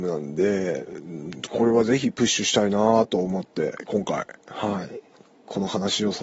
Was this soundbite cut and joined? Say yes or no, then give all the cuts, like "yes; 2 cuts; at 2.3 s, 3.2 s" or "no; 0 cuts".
no; 0 cuts